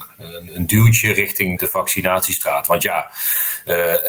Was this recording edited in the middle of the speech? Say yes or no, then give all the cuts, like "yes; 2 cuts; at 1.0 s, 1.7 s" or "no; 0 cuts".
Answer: yes; 1 cut; at 1.6 s